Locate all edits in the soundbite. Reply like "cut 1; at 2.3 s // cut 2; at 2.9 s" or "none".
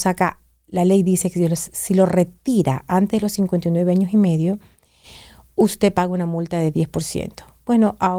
none